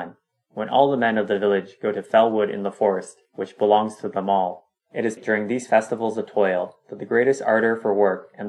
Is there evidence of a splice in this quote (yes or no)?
yes